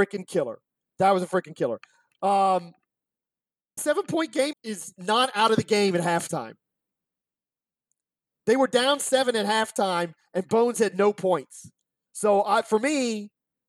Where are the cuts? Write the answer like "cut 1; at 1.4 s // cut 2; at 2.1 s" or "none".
cut 1; at 3.8 s // cut 2; at 4.5 s